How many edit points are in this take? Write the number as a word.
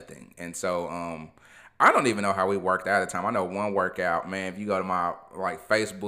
zero